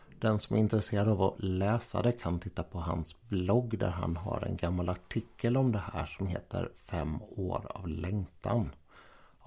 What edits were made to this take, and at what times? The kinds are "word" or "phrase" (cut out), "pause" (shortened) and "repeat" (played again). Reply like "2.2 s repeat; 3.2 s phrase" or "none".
none